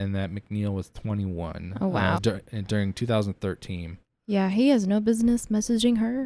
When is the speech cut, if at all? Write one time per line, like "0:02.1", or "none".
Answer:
0:02.2